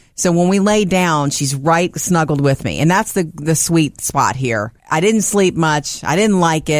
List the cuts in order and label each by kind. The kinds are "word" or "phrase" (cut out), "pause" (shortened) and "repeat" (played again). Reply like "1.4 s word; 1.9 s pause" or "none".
4.8 s pause